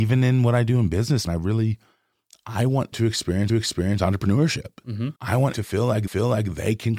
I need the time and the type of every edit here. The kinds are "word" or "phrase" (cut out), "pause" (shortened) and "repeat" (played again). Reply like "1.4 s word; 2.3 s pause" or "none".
1.3 s word; 2.9 s word; 3.5 s repeat; 5.2 s pause; 5.5 s word; 6.1 s repeat